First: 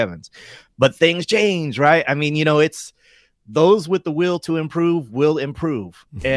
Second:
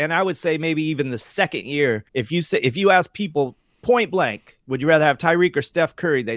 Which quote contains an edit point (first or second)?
second